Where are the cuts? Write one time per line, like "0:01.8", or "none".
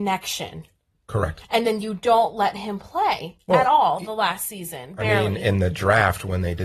none

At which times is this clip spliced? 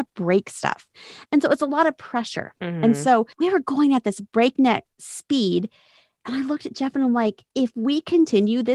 0:02.6
0:03.3
0:04.9
0:07.5

